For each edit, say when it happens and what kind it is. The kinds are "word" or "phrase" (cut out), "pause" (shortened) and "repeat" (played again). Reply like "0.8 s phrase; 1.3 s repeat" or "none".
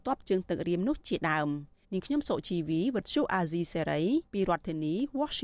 1.8 s pause; 4.3 s pause